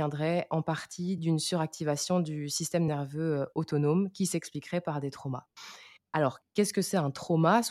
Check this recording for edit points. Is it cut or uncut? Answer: uncut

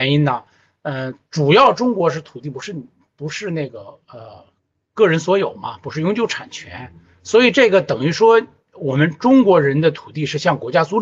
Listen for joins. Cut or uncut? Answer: uncut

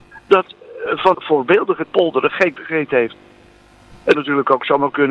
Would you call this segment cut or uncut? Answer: cut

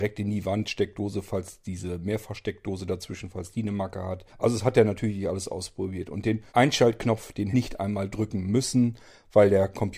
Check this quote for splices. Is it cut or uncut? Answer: cut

